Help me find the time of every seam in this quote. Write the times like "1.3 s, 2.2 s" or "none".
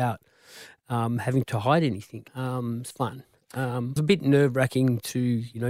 1.4 s, 2.3 s, 2.9 s, 4.0 s